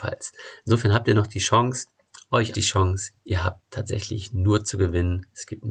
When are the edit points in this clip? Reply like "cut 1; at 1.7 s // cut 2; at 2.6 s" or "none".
cut 1; at 2.5 s